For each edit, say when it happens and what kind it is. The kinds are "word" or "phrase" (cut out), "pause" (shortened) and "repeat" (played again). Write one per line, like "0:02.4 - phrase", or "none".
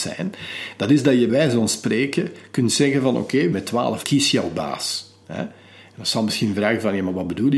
0:01.3 - word
0:03.5 - phrase
0:04.0 - word
0:05.2 - pause